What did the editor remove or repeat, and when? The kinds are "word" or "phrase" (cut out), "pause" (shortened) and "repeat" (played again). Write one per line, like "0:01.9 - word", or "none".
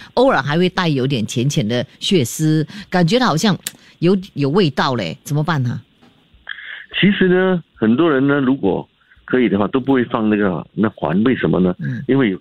none